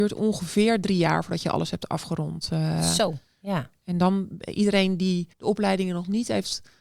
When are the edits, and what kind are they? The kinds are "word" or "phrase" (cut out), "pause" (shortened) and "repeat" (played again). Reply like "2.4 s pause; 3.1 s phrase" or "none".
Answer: 5.3 s pause